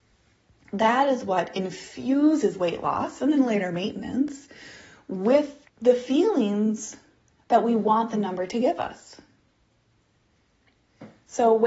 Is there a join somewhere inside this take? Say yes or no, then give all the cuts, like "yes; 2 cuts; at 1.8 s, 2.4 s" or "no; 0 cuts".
yes; 1 cut; at 5.7 s